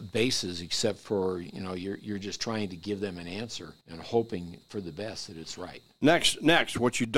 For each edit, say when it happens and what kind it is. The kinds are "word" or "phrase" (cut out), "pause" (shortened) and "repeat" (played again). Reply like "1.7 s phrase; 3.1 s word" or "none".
3.8 s pause